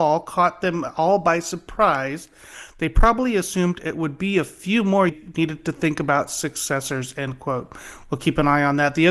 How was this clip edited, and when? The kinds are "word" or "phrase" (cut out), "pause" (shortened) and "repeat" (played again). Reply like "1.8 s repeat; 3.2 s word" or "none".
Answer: 5.1 s phrase